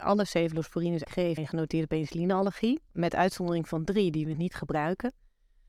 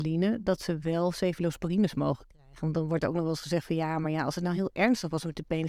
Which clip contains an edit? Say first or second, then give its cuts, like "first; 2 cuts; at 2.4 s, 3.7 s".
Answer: first; 4 cuts; at 1.0 s, 1.4 s, 2.9 s, 4.3 s